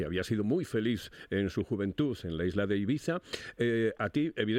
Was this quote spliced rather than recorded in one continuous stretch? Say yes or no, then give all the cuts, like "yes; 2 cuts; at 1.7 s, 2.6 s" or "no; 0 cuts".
no; 0 cuts